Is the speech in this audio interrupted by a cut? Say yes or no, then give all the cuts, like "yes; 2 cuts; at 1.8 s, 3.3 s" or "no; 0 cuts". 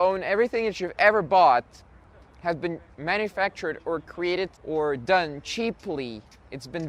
yes; 1 cut; at 4.6 s